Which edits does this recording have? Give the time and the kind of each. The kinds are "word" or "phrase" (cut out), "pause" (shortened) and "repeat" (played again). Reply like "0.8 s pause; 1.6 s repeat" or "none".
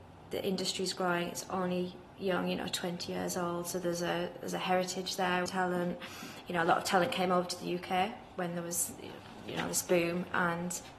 5.5 s phrase